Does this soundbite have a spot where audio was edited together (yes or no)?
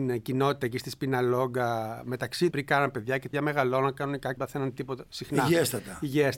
yes